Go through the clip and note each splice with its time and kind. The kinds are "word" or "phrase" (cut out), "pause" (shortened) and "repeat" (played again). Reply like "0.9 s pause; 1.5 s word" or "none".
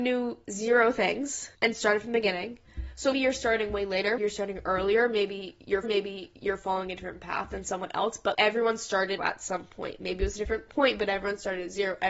1.5 s pause; 3.1 s word; 4.2 s word; 5.8 s repeat; 8.3 s word; 9.2 s phrase